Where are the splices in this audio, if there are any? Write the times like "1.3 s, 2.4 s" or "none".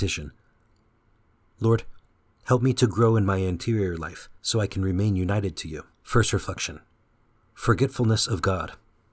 4.4 s, 5.9 s